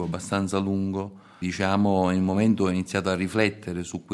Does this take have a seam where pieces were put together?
yes; 1 cut; at 1.4 s

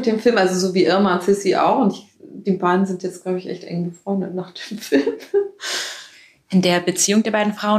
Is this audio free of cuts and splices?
yes; 0 cuts

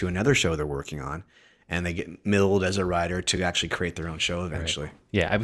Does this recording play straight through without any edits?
yes; 0 cuts

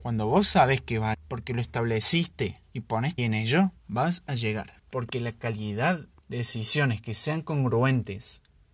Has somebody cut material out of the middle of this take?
yes; 6 cuts; at 1.1 s, 2.6 s, 3.2 s, 3.8 s, 4.8 s, 6.1 s

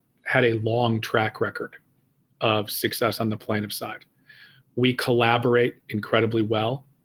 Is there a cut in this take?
no; 0 cuts

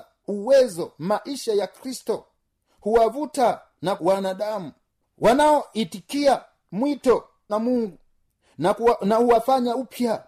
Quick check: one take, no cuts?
no; 2 cuts; at 4.0 s, 7.5 s

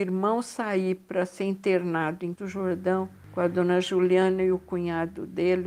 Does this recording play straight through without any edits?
no; 1 cut; at 2.4 s

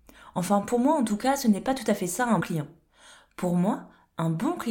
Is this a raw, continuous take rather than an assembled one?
no; 1 cut; at 2.4 s

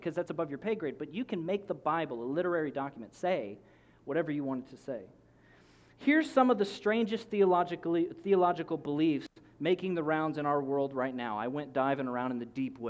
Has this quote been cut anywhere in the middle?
no; 0 cuts

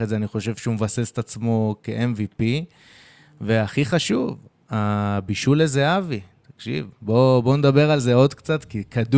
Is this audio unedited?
yes; 0 cuts

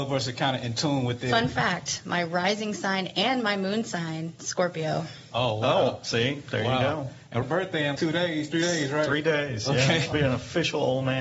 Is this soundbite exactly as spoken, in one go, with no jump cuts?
no; 3 cuts; at 7.4 s, 8.0 s, 10.1 s

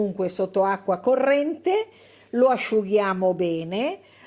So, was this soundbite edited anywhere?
no; 0 cuts

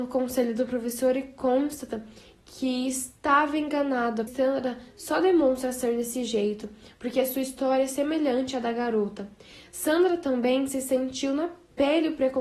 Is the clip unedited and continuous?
no; 1 cut; at 4.3 s

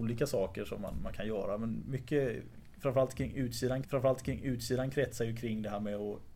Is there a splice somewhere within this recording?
yes; 1 cut; at 3.8 s

